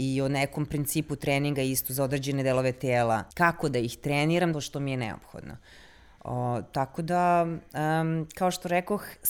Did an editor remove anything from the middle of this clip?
yes; 2 cuts; at 3.3 s, 4.5 s

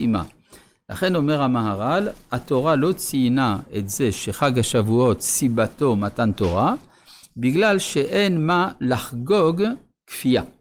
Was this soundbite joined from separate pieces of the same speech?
no; 0 cuts

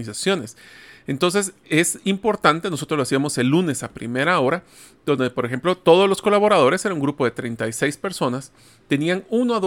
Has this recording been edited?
no; 0 cuts

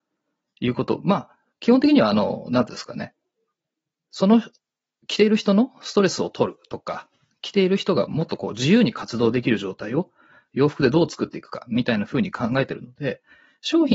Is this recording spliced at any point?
no; 0 cuts

